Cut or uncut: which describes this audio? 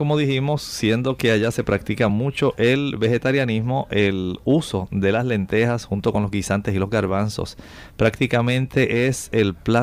uncut